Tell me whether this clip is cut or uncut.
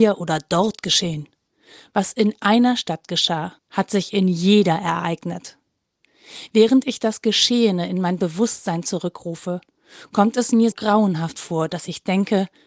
cut